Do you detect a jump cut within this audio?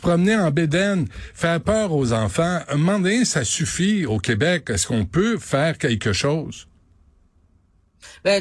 no; 0 cuts

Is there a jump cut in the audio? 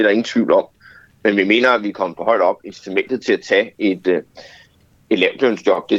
no; 0 cuts

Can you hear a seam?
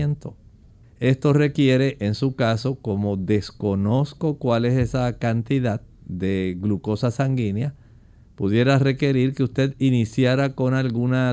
no; 0 cuts

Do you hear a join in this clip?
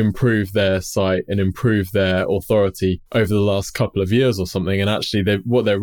yes; 1 cut; at 3.1 s

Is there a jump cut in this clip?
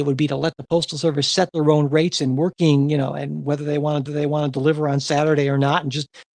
yes; 1 cut; at 4.1 s

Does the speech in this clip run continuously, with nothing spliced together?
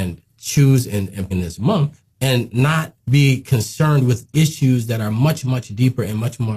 no; 3 cuts; at 1.3 s, 2.1 s, 3.0 s

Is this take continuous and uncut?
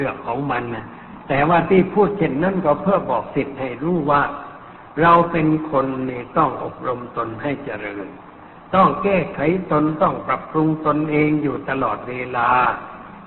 yes; 0 cuts

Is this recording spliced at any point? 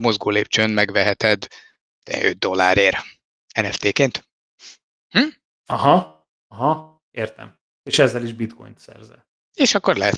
no; 0 cuts

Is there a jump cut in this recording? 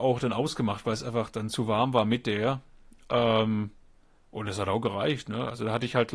no; 0 cuts

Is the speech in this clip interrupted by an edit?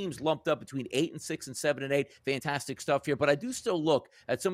no; 0 cuts

